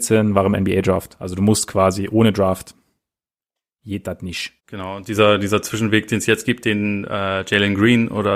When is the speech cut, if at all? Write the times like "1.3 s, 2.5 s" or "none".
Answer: 4.6 s